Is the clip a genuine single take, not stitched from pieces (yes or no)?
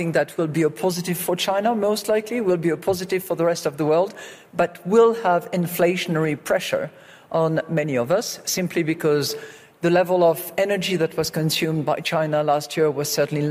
yes